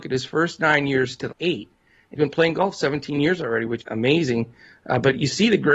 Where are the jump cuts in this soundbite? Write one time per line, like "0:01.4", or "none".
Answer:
0:01.3
0:02.2
0:03.8

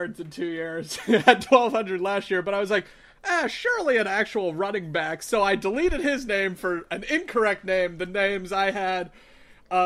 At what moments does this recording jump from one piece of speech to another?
none

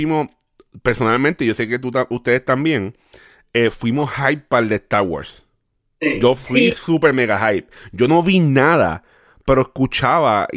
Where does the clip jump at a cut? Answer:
none

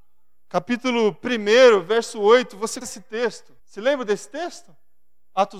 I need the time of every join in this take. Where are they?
0:02.8
0:03.6

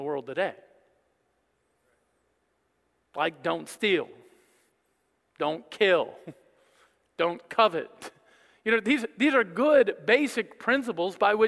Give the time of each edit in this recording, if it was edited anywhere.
none

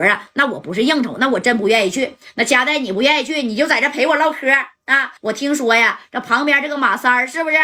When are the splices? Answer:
0:05.2

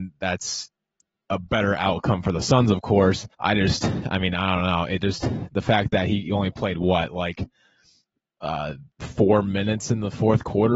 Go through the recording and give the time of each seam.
0:03.3
0:08.9

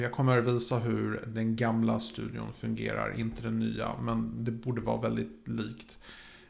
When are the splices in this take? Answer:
none

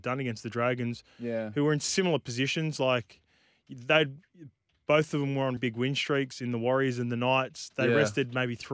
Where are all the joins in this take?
0:05.6

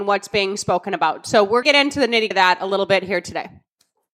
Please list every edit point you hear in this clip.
0:01.6
0:02.3

